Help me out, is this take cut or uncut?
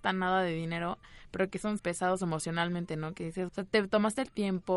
cut